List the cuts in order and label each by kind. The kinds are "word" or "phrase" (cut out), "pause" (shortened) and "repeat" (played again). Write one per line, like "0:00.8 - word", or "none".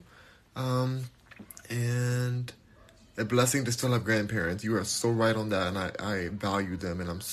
none